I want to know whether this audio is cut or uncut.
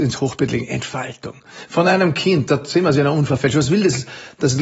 uncut